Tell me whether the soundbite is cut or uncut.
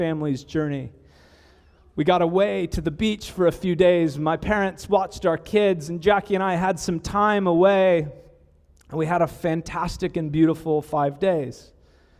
uncut